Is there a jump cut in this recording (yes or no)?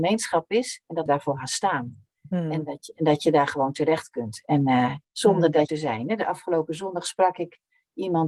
yes